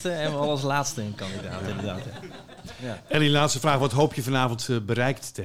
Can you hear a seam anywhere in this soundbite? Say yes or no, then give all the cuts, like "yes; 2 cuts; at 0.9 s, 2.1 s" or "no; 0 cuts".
no; 0 cuts